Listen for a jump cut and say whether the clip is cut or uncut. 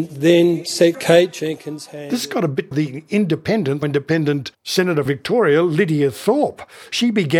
cut